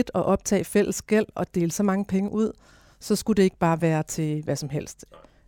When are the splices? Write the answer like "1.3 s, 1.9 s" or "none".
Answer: none